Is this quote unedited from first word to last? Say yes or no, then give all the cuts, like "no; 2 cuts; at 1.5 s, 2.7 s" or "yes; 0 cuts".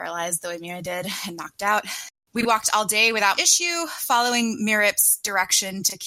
no; 1 cut; at 3.3 s